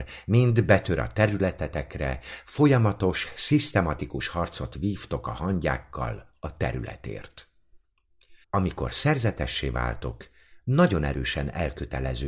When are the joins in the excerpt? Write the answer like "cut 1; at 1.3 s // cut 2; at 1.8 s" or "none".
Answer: cut 1; at 8.4 s